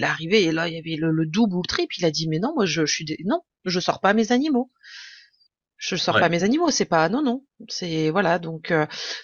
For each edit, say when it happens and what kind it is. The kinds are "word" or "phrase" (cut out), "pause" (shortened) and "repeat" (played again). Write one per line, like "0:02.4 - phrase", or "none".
none